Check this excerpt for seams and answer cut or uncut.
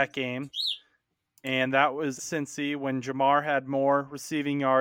cut